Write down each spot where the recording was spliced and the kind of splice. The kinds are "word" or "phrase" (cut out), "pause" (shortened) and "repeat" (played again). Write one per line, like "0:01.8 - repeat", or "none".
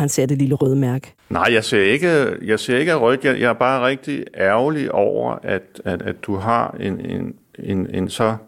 0:01.2 - pause